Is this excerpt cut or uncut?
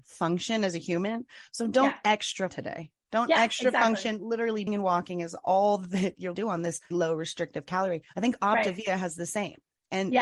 cut